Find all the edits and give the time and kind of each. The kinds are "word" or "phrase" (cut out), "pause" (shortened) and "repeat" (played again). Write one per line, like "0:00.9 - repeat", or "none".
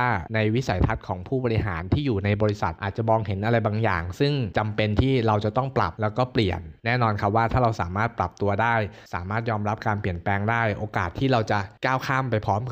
0:09.1 - pause